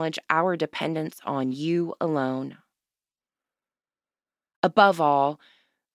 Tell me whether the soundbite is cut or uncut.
uncut